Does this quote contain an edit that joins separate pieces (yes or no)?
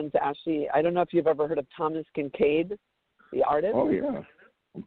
no